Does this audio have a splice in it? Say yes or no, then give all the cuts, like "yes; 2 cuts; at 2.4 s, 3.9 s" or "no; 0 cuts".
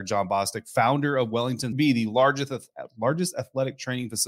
yes; 1 cut; at 1.7 s